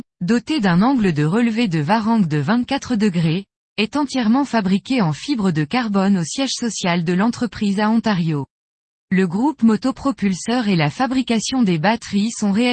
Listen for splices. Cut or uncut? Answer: uncut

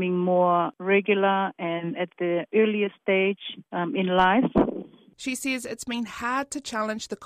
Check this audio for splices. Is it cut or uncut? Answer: uncut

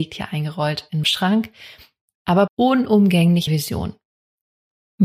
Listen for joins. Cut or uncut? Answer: cut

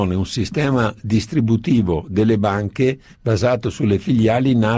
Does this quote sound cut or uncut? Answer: uncut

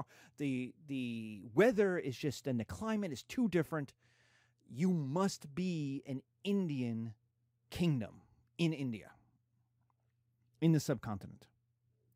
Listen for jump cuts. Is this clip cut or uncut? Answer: uncut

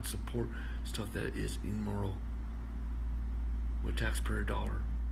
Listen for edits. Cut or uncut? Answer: uncut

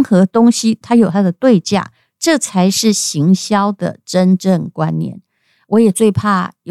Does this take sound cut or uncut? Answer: uncut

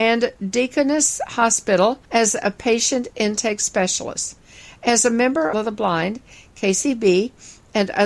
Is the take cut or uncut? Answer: cut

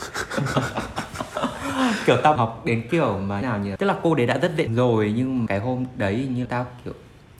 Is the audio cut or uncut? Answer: cut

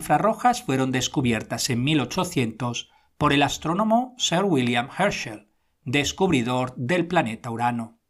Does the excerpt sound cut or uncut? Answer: uncut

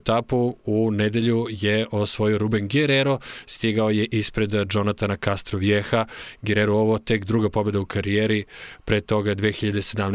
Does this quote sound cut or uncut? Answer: uncut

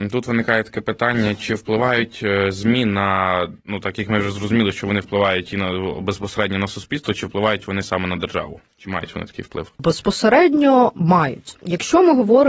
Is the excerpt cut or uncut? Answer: cut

